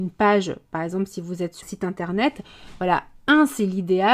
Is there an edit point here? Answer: yes; 1 cut; at 1.6 s

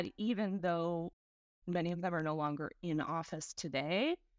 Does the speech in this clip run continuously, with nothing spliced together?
yes; 0 cuts

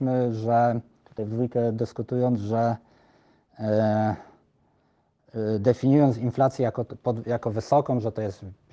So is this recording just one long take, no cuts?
yes; 0 cuts

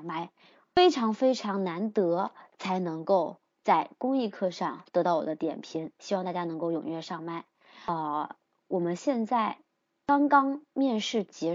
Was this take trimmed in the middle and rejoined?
no; 0 cuts

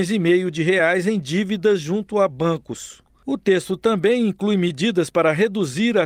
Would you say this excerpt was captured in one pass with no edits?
yes; 0 cuts

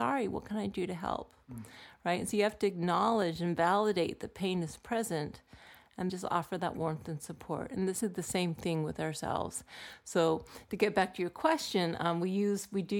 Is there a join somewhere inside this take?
yes; 2 cuts; at 6.1 s, 8.0 s

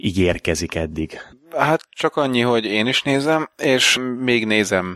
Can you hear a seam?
no; 0 cuts

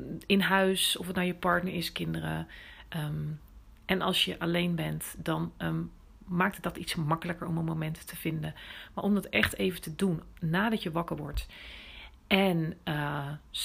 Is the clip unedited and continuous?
yes; 0 cuts

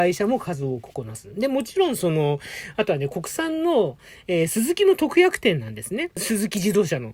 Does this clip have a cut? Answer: no; 0 cuts

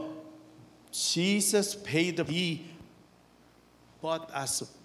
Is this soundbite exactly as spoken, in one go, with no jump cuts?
no; 1 cut; at 2.3 s

